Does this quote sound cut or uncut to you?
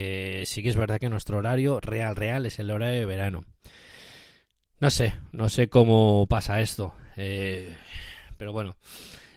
uncut